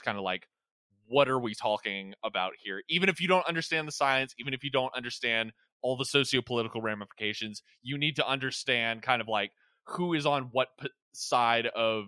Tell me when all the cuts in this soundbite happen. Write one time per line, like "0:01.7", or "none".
none